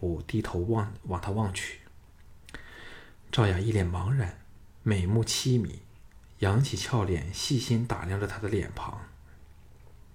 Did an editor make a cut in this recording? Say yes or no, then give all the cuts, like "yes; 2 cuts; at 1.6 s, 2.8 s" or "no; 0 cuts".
no; 0 cuts